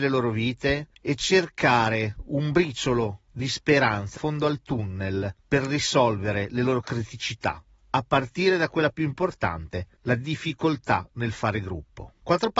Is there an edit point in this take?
yes; 1 cut; at 4.1 s

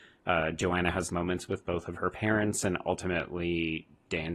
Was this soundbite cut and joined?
yes; 1 cut; at 1.1 s

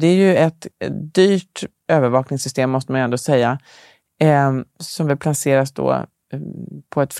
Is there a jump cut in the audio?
no; 0 cuts

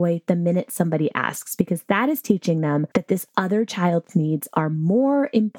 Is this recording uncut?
no; 1 cut; at 2.9 s

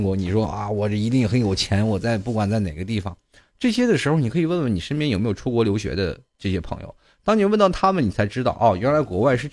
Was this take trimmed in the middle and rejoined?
no; 0 cuts

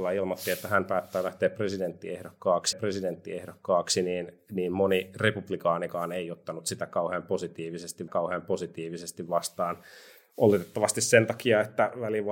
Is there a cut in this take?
yes; 2 cuts; at 2.7 s, 8.1 s

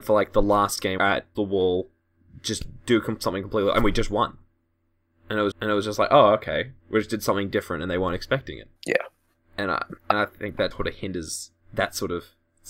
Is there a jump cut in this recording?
yes; 7 cuts; at 1.0 s, 1.3 s, 5.5 s, 6.8 s, 8.8 s, 10.0 s, 10.7 s

